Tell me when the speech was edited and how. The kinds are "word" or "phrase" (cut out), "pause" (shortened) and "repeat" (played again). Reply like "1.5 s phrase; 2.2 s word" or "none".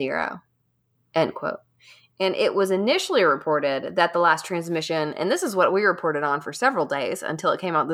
none

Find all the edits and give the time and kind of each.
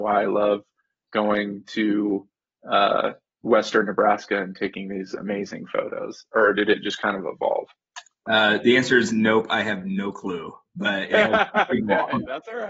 none

